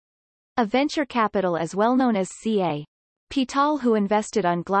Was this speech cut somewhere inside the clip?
yes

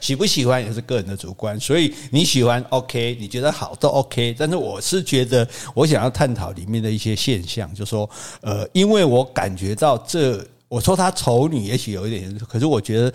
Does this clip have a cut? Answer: no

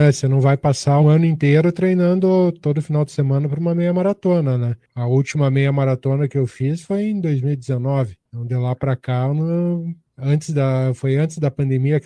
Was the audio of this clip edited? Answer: yes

